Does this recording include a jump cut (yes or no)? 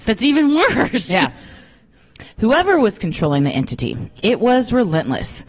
yes